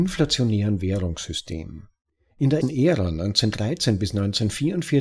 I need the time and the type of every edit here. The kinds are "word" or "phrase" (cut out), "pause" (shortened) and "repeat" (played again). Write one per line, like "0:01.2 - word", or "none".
0:02.6 - word